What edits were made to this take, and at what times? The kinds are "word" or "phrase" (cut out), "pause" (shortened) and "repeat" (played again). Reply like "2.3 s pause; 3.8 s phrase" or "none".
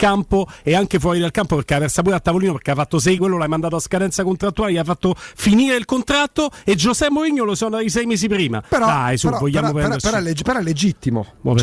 3.2 s word